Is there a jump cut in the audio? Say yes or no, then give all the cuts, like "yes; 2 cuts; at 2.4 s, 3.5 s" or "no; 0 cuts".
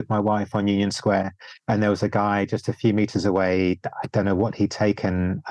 no; 0 cuts